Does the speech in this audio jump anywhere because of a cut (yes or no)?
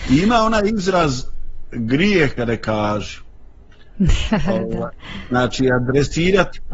yes